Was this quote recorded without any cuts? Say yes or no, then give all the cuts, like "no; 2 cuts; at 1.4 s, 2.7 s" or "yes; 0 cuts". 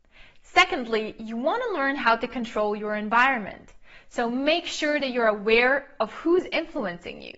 yes; 0 cuts